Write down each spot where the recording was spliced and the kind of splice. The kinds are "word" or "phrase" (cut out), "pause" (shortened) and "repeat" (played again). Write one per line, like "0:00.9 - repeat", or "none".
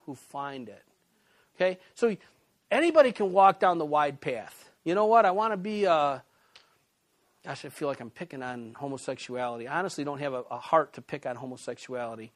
0:04.8 - pause

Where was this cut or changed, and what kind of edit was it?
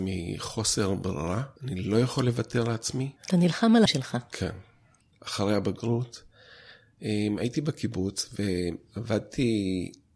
0:01.6 - pause
0:03.2 - pause
0:03.9 - word

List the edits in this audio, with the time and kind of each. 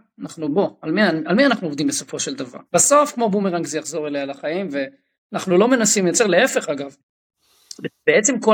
0:02.7 - pause

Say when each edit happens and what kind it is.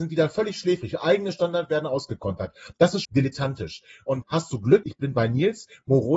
0:03.0 - word
0:04.2 - word
0:04.8 - word

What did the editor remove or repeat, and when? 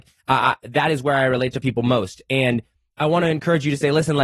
none

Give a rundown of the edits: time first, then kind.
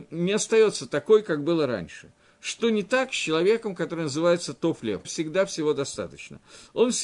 0:05.0 - word

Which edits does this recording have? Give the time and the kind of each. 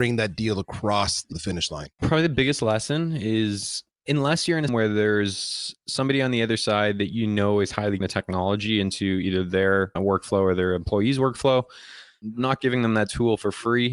0:01.3 - word
0:04.7 - word
0:08.0 - phrase
0:10.0 - word

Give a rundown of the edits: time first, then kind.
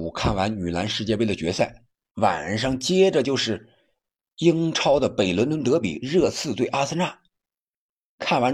none

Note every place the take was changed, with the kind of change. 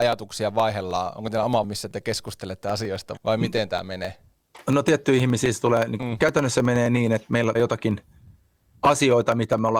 0:01.6 - word
0:03.2 - word
0:06.0 - phrase
0:07.5 - word

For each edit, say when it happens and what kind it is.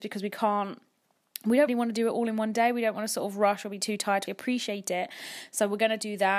0:01.7 - word
0:04.3 - word

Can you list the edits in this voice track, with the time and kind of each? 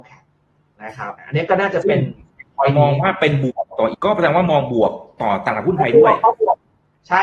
0:01.2 - pause
0:03.9 - word

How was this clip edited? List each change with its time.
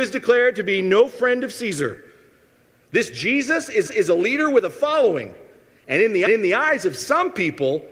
0:03.9 - repeat
0:06.3 - repeat

